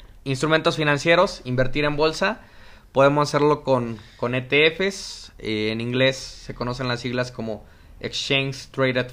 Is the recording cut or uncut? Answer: uncut